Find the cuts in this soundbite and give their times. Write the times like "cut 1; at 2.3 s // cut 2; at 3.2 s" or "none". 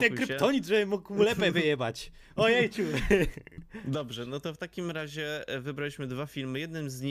none